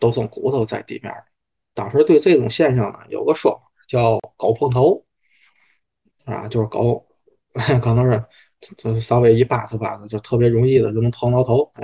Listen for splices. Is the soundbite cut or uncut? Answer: uncut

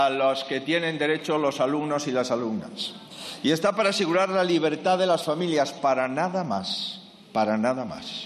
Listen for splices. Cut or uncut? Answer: uncut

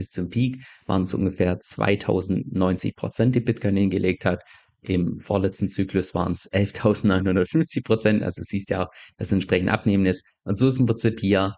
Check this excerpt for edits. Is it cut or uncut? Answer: uncut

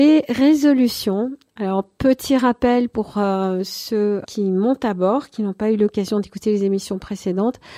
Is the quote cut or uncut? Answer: cut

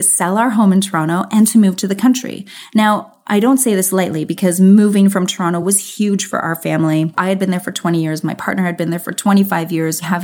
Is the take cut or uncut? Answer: uncut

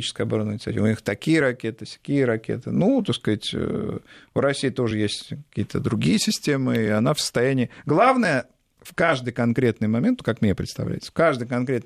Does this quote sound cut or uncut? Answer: uncut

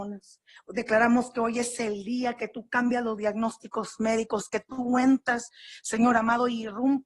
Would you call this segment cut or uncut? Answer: uncut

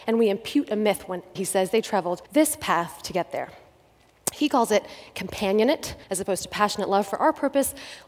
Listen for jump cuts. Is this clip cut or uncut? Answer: cut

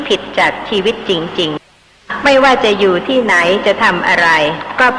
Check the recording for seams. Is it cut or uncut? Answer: cut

